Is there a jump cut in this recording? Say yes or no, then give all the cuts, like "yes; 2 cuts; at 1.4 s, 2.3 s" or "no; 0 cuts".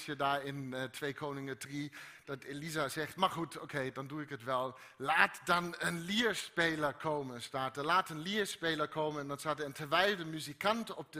no; 0 cuts